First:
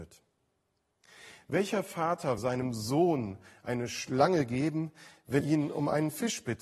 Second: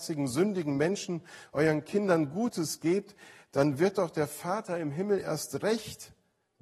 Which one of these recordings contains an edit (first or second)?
first